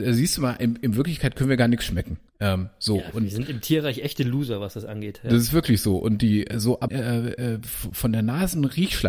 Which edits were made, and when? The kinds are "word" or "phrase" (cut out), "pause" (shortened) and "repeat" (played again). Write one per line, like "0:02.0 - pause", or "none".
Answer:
0:02.3 - pause
0:06.9 - phrase